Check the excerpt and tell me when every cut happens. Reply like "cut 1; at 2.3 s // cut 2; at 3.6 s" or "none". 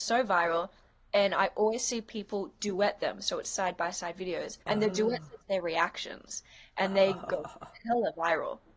cut 1; at 4.6 s // cut 2; at 5.4 s